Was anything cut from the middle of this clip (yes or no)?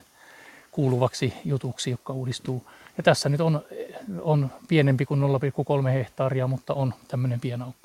no